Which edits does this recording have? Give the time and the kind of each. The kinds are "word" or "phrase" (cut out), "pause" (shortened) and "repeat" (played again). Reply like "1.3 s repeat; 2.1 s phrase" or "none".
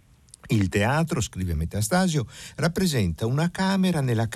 none

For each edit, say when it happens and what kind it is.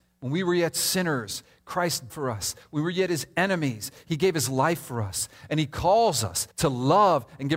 2.1 s word; 6.5 s pause

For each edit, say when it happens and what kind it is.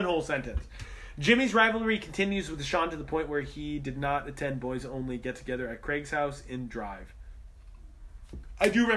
none

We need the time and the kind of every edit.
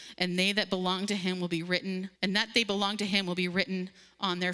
2.2 s pause

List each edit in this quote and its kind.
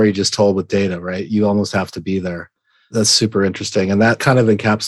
none

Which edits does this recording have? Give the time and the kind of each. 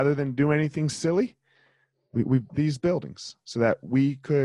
2.5 s word

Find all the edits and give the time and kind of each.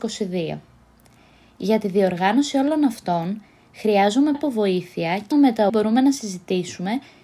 4.3 s word; 5.3 s word; 5.7 s word

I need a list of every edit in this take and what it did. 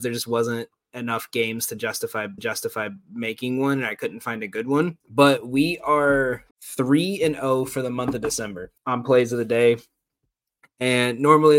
2.4 s repeat; 5.0 s pause; 6.5 s pause; 8.8 s pause

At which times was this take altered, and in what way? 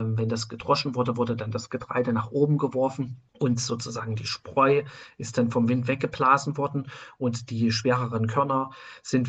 3.3 s pause

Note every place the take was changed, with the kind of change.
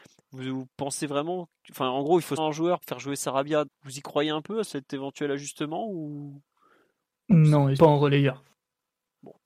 2.4 s word; 2.8 s word; 3.7 s word; 4.6 s word; 7.8 s word

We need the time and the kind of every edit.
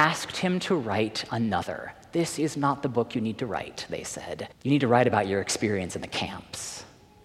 4.5 s pause

